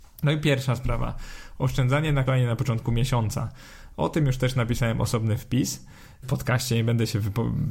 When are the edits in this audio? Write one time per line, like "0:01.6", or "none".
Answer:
0:02.3
0:06.2